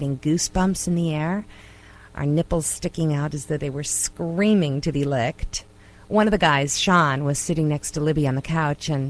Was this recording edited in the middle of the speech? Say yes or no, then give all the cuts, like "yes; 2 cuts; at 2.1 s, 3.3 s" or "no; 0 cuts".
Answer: no; 0 cuts